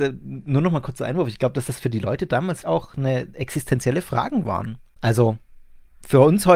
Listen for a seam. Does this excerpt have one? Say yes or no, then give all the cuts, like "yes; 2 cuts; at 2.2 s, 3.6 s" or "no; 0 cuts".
yes; 1 cut; at 2.6 s